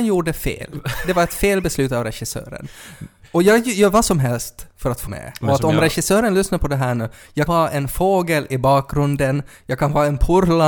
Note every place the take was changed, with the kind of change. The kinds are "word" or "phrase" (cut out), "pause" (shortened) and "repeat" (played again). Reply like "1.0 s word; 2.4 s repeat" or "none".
5.1 s word; 7.5 s word